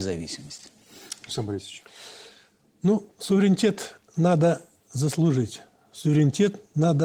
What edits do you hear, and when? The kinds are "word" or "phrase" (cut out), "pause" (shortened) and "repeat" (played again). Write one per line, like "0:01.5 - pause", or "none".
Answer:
none